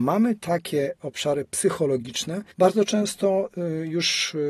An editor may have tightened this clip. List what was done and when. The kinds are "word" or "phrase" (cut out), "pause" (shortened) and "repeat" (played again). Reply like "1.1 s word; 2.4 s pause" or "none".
2.5 s pause